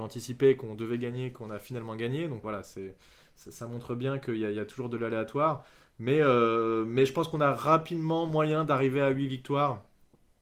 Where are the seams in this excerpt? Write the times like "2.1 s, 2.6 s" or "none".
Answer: 2.4 s